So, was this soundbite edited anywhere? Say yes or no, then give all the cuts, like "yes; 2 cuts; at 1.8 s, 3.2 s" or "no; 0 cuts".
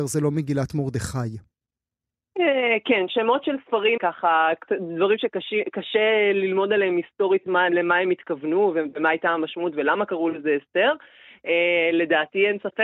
yes; 2 cuts; at 4.0 s, 7.7 s